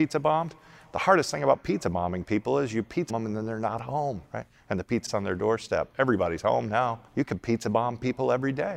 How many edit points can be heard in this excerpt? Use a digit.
4